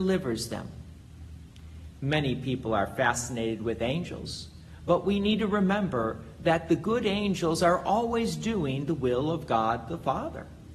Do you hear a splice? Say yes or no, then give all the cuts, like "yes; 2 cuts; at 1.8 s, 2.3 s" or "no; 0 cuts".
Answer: no; 0 cuts